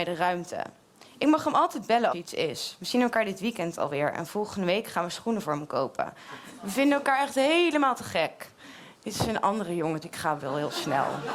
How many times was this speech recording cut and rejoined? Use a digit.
2